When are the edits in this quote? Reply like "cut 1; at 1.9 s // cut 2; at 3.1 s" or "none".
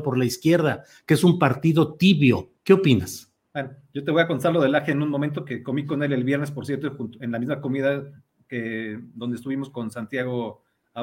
cut 1; at 2.5 s